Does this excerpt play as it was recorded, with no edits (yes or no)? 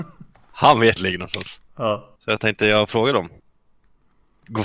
no